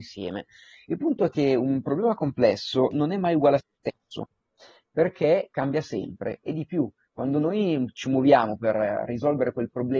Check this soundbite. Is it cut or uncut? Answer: uncut